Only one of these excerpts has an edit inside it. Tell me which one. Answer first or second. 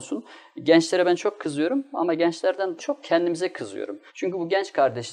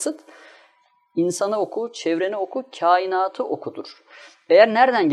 first